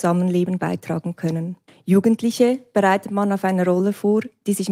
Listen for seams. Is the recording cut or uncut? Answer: cut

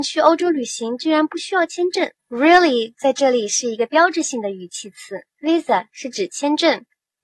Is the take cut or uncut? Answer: cut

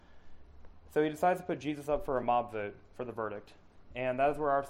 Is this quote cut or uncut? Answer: uncut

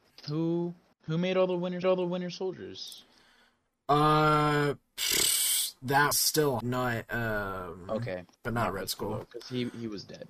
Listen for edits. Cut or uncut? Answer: cut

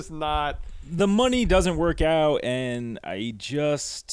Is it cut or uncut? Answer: uncut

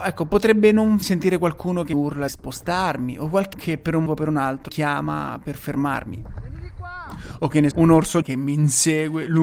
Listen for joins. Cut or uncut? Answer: cut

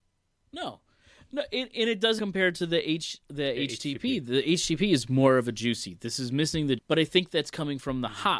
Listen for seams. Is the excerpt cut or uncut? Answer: cut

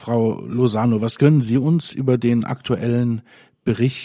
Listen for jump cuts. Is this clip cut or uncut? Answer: uncut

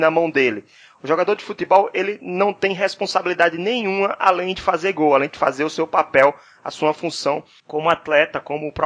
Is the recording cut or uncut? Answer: uncut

